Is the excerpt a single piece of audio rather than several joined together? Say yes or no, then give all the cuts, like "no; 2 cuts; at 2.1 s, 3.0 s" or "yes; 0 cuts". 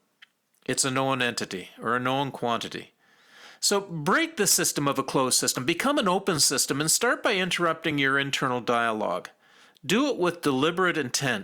yes; 0 cuts